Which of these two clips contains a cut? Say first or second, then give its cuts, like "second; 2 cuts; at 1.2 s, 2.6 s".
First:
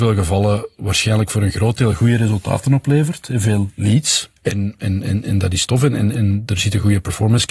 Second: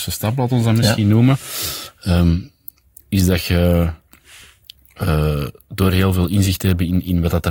first; 1 cut; at 4.4 s